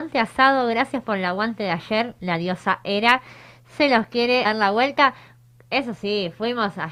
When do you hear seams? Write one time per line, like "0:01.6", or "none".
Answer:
0:04.4